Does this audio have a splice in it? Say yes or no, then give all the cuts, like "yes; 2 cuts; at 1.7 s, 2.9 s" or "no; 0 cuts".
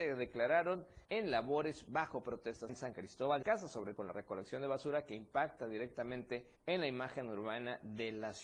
yes; 5 cuts; at 1.0 s, 2.7 s, 3.4 s, 4.0 s, 6.6 s